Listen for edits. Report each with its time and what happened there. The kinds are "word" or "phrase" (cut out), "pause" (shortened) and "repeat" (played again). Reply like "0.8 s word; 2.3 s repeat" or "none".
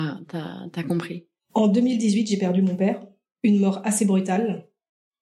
none